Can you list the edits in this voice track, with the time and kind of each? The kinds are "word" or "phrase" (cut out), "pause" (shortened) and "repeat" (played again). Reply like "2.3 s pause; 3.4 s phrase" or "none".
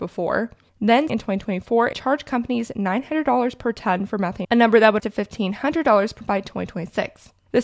1.1 s word; 1.9 s word; 4.4 s word; 5.0 s word; 6.2 s word